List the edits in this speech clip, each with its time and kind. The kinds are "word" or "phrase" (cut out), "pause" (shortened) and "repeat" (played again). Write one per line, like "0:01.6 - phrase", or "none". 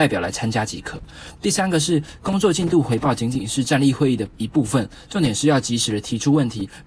0:04.3 - pause

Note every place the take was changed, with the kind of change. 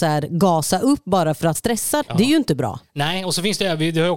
0:01.5 - word
0:02.0 - word

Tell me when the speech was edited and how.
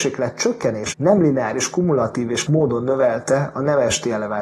0:00.9 - word
0:02.5 - word

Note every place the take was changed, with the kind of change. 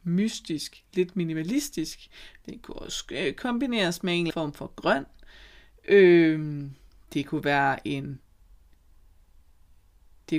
0:04.3 - word

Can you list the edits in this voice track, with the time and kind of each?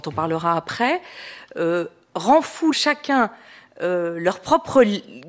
0:02.7 - phrase

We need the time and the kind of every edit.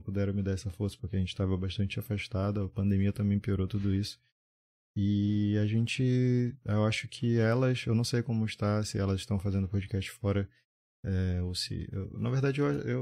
none

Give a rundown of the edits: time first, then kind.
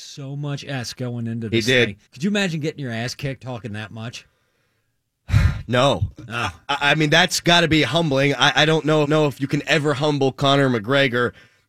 0:02.1 - pause
0:03.4 - word
0:09.0 - repeat

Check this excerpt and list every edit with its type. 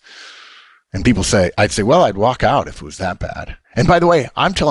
0:03.6 - pause

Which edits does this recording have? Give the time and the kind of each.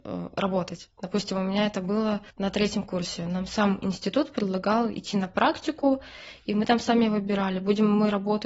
0:02.3 - pause

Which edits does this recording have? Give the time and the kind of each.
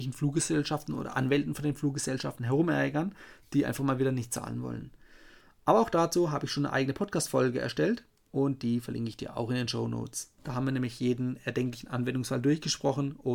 0:10.4 - pause

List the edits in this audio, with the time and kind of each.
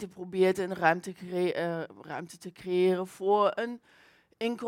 none

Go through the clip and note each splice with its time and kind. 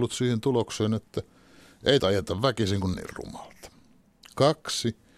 0:02.0 - phrase
0:02.9 - word

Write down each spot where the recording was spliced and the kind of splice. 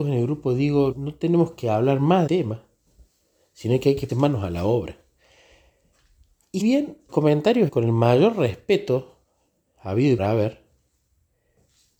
0:00.9 - word
0:02.3 - word
0:04.1 - word
0:06.6 - word
0:07.1 - word
0:07.7 - word
0:10.2 - word

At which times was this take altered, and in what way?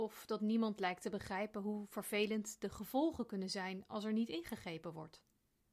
none

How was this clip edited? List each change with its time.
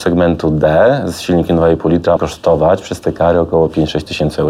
0:02.2 - word

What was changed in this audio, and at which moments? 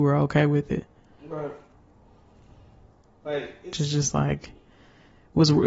0:03.7 - word

